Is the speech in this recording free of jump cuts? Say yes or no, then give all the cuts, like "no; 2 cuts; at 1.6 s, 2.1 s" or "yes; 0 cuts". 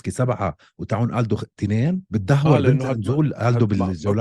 no; 1 cut; at 2.1 s